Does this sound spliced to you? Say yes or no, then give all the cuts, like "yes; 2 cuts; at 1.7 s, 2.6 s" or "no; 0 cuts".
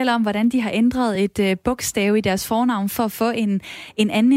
no; 0 cuts